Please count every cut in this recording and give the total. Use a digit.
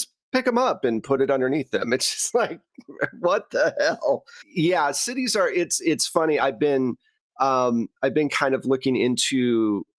0